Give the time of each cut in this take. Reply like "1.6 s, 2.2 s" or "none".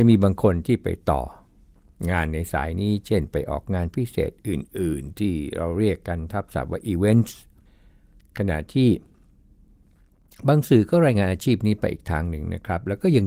none